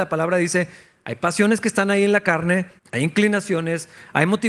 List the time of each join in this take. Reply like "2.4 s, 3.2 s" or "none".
2.8 s